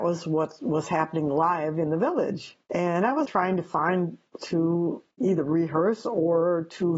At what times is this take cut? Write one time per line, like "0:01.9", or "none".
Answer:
0:03.2
0:04.4

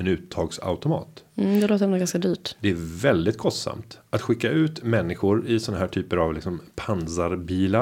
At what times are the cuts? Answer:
none

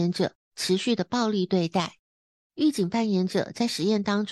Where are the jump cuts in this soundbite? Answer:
none

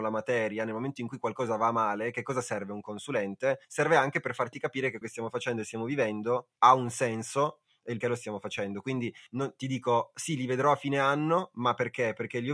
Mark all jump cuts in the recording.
0:03.6
0:05.0
0:06.6
0:08.0
0:09.3

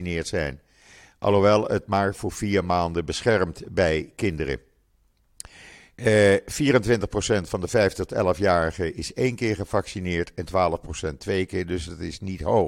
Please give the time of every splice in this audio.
none

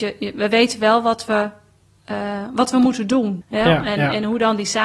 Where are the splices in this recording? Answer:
none

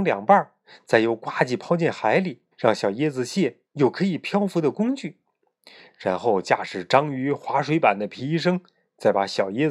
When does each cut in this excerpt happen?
0:02.5
0:03.6

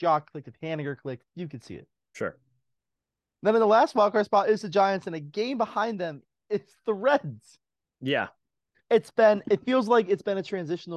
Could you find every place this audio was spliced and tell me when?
0:01.3

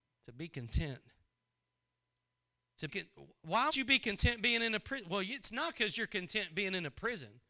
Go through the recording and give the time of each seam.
0:02.9
0:03.7

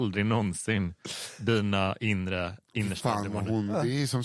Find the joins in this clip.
none

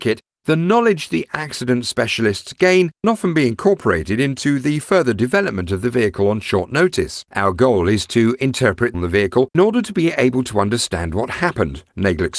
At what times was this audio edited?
0:03.0
0:07.3
0:08.9
0:09.5

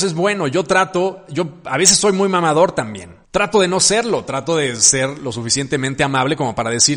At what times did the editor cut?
0:03.2

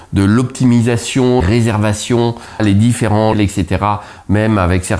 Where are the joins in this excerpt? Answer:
0:01.4
0:02.6
0:03.3

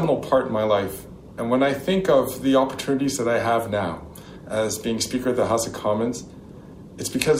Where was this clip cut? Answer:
none

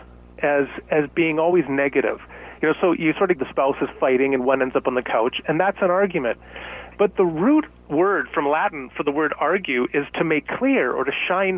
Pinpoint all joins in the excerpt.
0:03.4

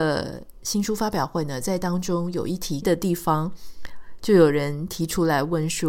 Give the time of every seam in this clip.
0:02.8

